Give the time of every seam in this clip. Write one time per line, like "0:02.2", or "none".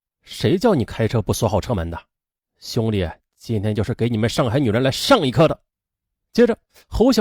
0:05.7